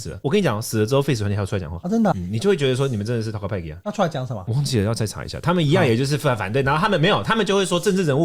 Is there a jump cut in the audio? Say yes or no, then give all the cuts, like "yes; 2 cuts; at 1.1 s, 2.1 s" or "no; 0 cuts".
yes; 1 cut; at 2.1 s